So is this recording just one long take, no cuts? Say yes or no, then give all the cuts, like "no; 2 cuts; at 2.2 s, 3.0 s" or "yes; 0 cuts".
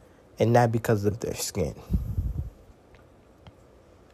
no; 1 cut; at 1.1 s